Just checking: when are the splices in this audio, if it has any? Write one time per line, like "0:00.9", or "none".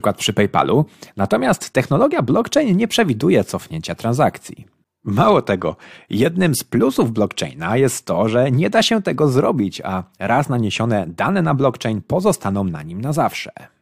none